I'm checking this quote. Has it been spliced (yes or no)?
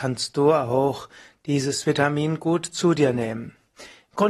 no